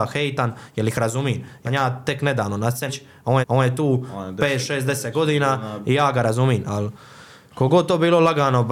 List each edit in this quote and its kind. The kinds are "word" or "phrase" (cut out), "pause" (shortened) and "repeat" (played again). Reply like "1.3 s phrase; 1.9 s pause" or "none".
1.7 s word; 2.9 s phrase; 3.4 s repeat